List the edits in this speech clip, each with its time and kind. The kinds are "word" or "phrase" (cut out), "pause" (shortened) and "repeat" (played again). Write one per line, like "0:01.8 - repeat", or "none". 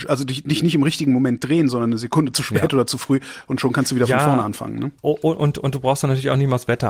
0:05.0 - pause